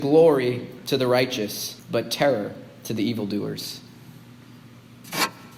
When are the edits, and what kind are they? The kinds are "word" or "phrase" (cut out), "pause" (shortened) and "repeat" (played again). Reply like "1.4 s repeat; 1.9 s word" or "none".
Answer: 1.8 s pause